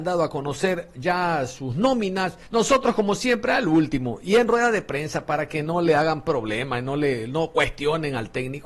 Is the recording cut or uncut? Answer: cut